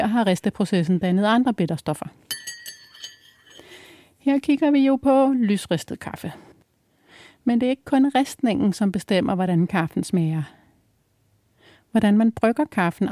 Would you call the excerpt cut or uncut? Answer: uncut